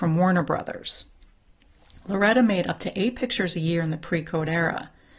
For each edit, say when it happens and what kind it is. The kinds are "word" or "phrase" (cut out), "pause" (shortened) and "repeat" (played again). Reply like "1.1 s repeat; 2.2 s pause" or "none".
none